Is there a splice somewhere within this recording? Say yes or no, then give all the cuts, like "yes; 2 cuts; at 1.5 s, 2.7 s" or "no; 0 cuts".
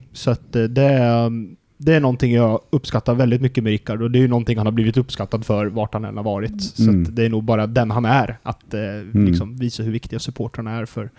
no; 0 cuts